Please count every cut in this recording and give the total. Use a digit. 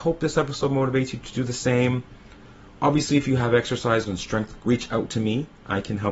2